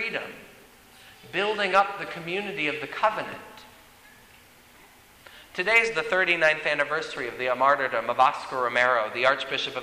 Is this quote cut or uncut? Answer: uncut